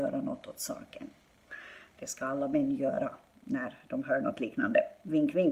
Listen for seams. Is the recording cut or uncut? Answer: uncut